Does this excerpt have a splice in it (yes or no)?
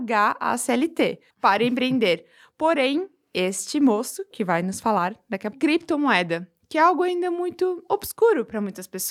yes